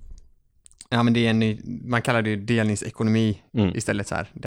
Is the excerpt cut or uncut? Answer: uncut